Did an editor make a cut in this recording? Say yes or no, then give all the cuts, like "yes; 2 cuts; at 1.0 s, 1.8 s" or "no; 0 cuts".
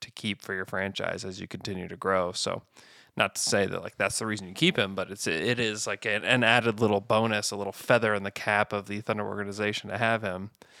no; 0 cuts